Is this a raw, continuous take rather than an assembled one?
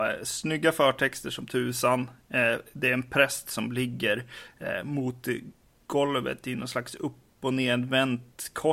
yes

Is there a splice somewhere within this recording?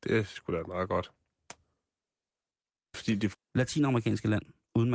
yes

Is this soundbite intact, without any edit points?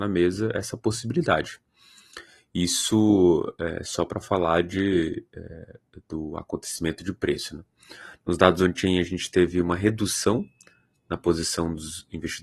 yes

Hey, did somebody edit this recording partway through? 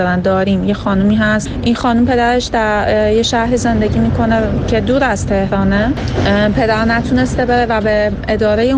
no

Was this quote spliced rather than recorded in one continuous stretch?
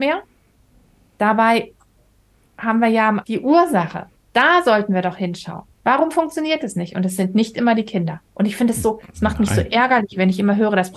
yes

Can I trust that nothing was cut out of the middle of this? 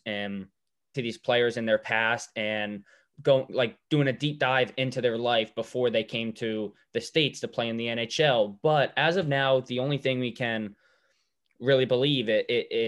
no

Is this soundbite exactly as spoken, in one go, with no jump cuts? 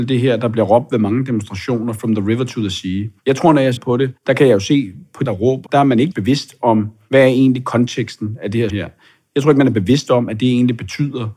no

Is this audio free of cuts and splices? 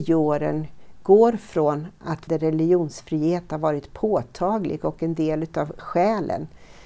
no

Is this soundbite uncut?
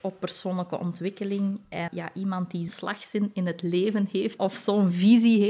no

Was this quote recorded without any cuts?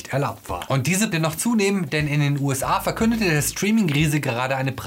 no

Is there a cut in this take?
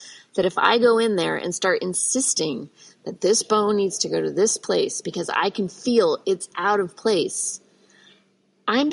no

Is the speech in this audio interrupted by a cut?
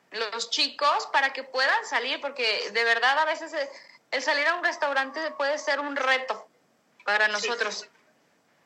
no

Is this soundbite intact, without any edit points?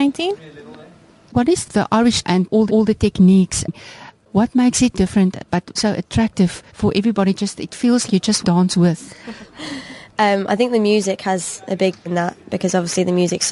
no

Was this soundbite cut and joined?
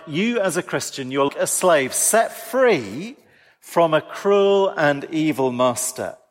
yes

